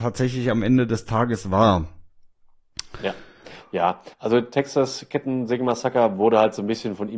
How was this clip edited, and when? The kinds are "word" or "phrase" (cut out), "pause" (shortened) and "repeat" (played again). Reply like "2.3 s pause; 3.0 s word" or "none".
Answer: 4.1 s pause